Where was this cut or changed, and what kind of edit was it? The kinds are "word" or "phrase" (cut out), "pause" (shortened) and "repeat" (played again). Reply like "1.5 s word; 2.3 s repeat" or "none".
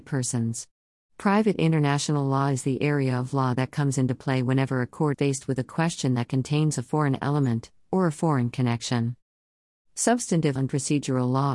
5.1 s word; 10.6 s word